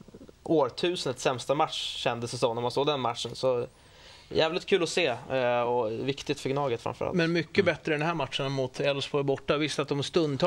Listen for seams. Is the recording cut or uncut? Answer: uncut